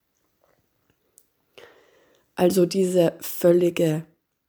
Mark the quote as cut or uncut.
uncut